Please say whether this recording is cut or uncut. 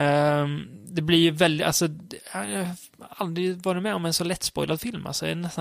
uncut